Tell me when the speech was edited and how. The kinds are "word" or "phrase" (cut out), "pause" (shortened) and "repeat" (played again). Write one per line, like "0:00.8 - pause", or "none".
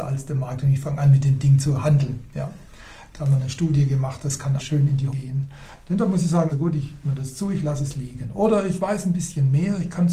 0:04.6 - word
0:05.1 - word
0:06.5 - word
0:07.0 - word